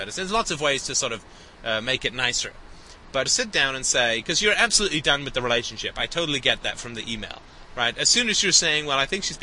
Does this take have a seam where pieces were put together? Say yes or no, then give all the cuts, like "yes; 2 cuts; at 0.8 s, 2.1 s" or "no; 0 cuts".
yes; 1 cut; at 3.3 s